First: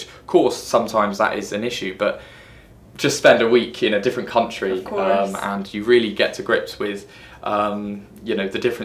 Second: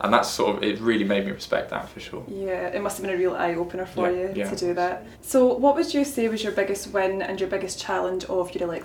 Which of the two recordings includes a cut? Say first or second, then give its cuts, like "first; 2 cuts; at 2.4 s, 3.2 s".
second; 1 cut; at 5.1 s